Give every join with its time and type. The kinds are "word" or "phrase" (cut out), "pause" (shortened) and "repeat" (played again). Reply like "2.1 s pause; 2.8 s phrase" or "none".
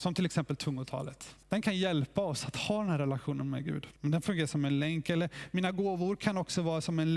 1.4 s pause; 4.0 s pause

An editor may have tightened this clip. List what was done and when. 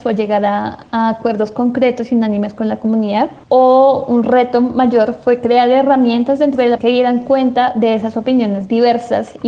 3.4 s pause; 6.8 s word

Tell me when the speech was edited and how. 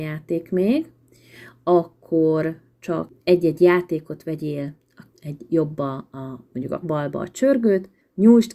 3.2 s pause; 5.1 s word; 6.8 s word

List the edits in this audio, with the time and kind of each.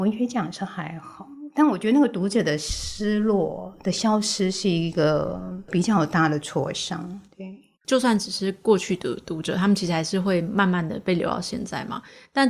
7.8 s pause

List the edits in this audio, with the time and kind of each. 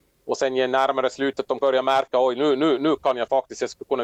1.6 s phrase

